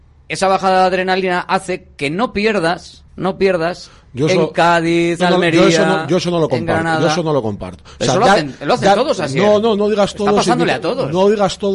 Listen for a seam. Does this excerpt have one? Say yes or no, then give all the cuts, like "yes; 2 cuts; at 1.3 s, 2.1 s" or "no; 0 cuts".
yes; 3 cuts; at 3.1 s, 5.2 s, 9.8 s